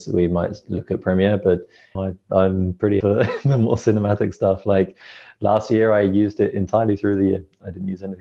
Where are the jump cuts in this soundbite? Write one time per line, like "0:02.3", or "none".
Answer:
0:01.9
0:03.0